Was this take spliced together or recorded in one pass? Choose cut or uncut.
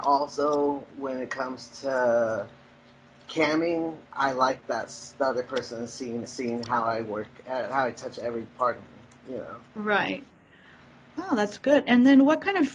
cut